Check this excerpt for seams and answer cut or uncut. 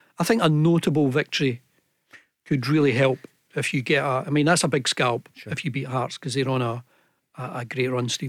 uncut